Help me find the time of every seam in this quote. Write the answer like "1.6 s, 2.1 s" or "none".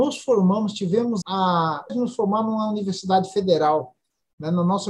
1.2 s, 1.9 s